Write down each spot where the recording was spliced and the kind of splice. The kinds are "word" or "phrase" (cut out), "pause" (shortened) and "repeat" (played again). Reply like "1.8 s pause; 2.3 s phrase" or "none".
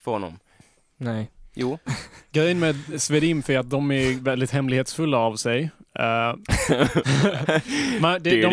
none